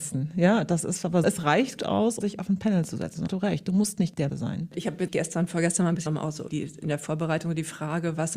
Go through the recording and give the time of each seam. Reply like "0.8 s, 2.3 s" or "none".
1.2 s, 1.8 s, 2.2 s, 3.3 s, 4.3 s, 5.1 s, 6.1 s, 6.5 s